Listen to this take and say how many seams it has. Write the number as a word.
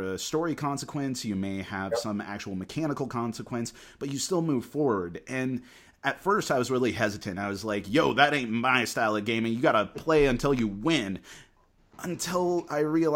zero